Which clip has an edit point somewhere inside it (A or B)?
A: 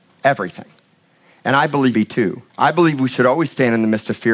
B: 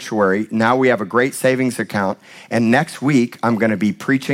A